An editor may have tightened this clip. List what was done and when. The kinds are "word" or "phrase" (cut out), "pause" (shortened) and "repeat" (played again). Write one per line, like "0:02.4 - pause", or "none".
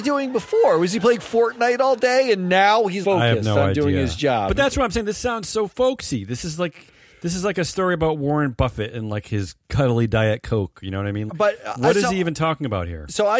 0:03.0 - word
0:09.6 - pause
0:11.3 - word